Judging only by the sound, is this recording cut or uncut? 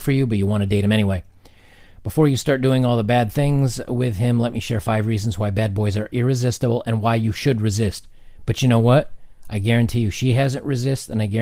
uncut